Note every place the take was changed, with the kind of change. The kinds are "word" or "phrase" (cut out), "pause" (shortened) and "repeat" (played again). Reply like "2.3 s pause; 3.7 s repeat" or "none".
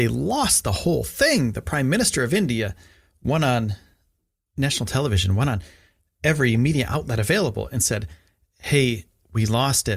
4.5 s word